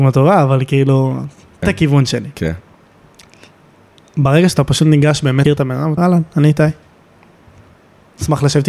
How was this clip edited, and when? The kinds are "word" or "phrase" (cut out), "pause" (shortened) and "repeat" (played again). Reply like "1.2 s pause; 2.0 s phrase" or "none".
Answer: 1.6 s word; 5.4 s word; 6.0 s word